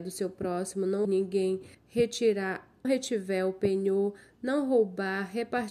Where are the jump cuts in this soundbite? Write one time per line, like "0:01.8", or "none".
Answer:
0:01.0
0:01.7
0:02.8